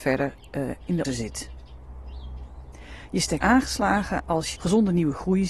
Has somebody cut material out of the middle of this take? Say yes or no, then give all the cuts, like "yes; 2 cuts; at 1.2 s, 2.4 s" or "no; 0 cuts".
yes; 3 cuts; at 1.0 s, 3.4 s, 4.6 s